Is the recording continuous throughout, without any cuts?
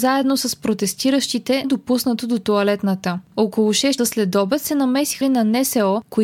no; 3 cuts; at 1.6 s, 4.0 s, 5.2 s

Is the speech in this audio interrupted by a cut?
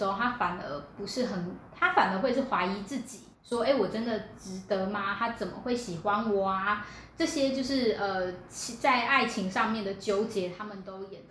yes; 1 cut; at 3.3 s

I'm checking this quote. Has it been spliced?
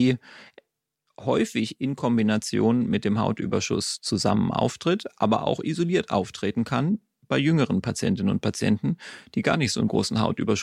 no; 0 cuts

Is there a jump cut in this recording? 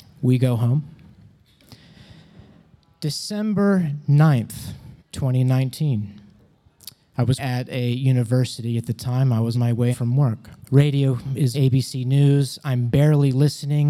yes; 6 cuts; at 5.0 s, 7.4 s, 9.5 s, 9.9 s, 10.6 s, 11.5 s

